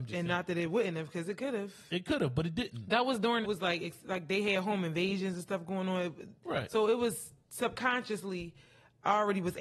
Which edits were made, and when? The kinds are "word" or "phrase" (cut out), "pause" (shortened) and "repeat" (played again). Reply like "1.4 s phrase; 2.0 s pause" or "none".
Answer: 3.4 s phrase